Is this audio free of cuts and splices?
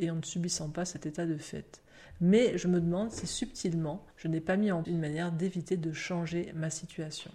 no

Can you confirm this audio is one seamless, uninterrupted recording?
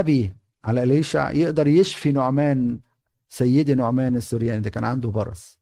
yes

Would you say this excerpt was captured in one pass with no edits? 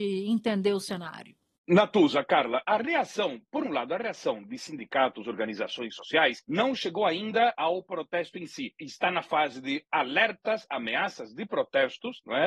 yes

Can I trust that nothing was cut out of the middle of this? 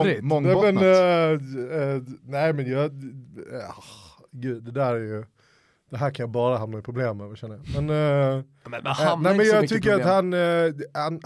yes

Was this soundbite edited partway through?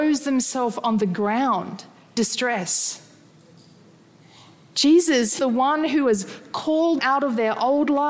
yes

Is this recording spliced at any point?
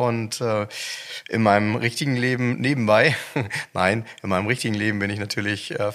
no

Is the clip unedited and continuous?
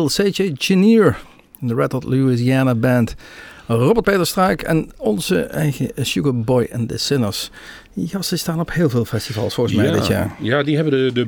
no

